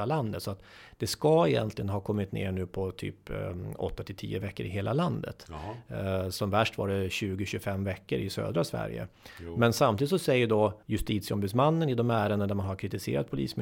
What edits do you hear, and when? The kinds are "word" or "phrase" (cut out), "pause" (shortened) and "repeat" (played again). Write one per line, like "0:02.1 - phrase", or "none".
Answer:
0:10.8 - pause